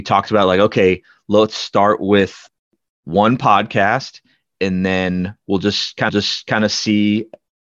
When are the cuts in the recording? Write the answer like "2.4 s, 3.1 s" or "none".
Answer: 6.1 s

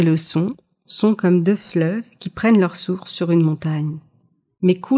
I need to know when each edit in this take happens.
none

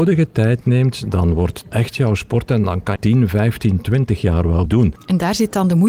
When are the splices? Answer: 1.6 s, 3.0 s, 4.7 s

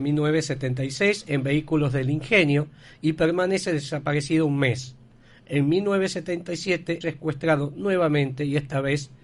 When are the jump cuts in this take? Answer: 7.0 s

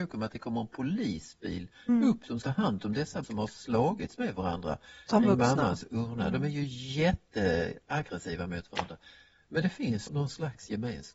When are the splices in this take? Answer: 2.4 s, 3.2 s, 10.1 s

